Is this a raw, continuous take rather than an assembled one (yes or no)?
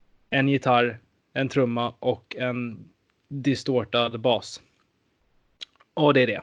yes